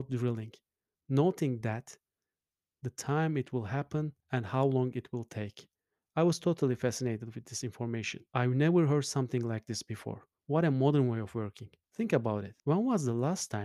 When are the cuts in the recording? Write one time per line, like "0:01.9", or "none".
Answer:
0:04.2
0:08.3
0:10.4
0:11.8
0:12.6